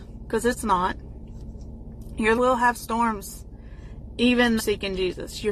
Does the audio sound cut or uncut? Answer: cut